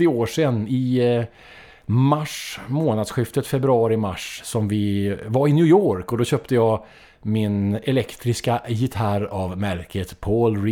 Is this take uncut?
yes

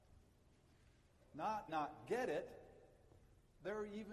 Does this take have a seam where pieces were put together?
yes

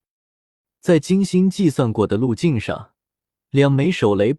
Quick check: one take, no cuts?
yes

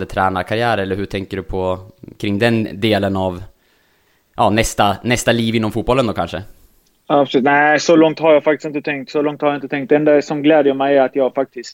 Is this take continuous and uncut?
yes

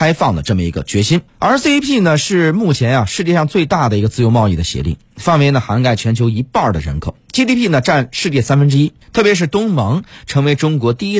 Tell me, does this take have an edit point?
yes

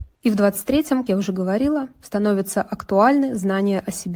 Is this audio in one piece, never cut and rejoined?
no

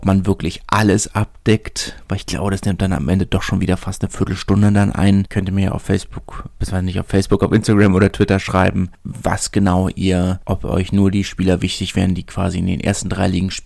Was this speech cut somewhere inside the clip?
no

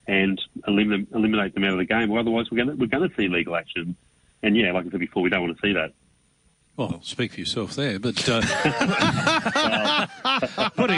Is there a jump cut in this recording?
no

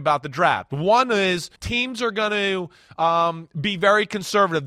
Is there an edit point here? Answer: yes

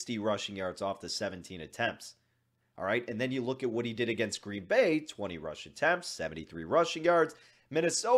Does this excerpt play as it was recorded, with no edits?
yes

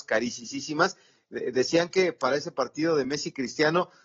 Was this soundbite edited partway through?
no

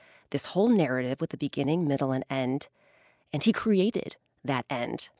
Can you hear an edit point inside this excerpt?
no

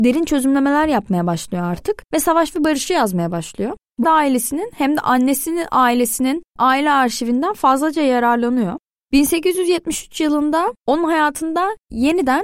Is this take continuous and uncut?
no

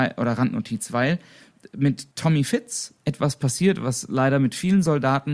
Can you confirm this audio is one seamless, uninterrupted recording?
no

